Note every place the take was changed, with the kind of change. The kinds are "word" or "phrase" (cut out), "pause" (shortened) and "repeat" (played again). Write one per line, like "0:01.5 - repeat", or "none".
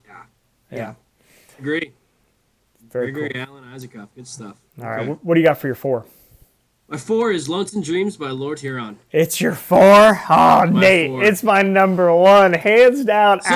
none